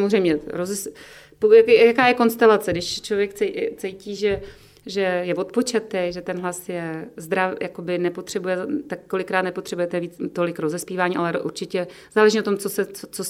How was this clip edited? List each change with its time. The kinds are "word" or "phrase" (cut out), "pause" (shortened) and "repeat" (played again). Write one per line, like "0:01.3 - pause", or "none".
none